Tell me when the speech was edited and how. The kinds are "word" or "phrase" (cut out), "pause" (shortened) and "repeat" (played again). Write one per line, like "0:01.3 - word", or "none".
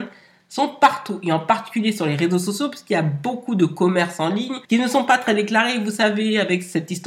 0:04.6 - pause